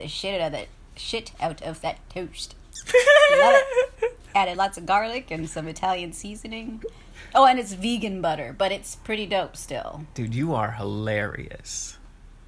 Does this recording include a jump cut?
no; 0 cuts

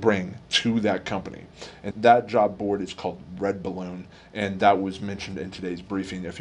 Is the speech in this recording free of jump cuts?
no; 1 cut; at 1.9 s

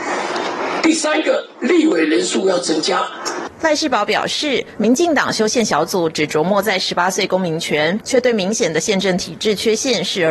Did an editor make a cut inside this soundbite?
yes; 1 cut; at 8.0 s

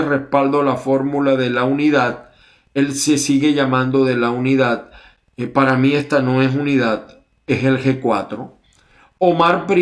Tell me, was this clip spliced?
no; 0 cuts

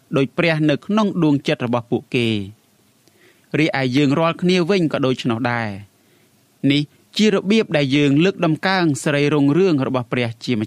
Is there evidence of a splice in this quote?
no; 0 cuts

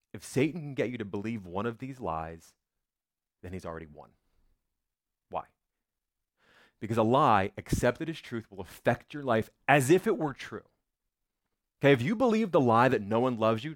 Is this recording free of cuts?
yes; 0 cuts

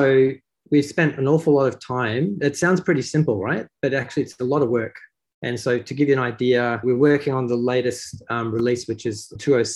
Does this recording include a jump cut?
no; 0 cuts

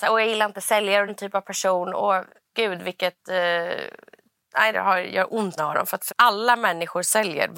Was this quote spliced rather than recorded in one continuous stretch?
yes; 5 cuts; at 1.1 s, 2.5 s, 4.7 s, 5.6 s, 6.1 s

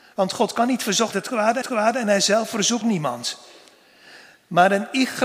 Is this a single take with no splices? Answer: no; 3 cuts; at 1.1 s, 1.6 s, 2.8 s

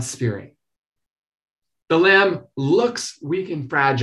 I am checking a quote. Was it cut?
no; 0 cuts

